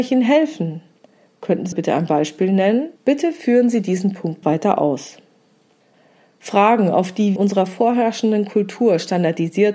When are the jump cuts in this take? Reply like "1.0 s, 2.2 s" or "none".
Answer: 1.7 s, 3.0 s, 4.4 s, 7.4 s